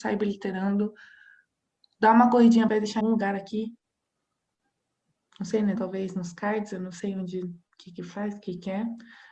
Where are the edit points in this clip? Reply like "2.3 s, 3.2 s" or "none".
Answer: 2.7 s, 3.0 s, 5.8 s